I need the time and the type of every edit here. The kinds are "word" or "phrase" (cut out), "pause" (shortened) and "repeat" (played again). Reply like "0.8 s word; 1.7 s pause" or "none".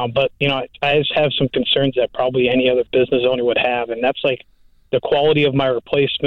none